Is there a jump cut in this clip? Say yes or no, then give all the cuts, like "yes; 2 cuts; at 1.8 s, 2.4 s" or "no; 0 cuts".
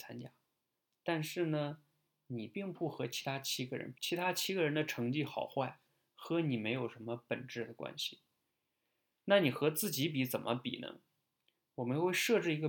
yes; 1 cut; at 3.9 s